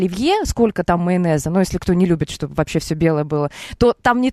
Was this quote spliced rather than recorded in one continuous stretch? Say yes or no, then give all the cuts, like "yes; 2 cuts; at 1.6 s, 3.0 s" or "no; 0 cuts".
no; 0 cuts